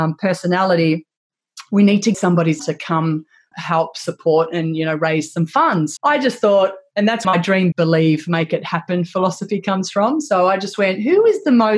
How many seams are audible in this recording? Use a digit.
6